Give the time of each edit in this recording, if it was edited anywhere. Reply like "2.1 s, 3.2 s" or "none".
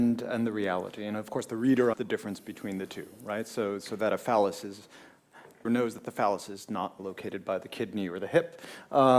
1.9 s, 5.6 s, 7.0 s